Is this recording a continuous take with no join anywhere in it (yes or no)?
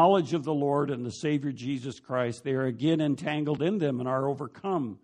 yes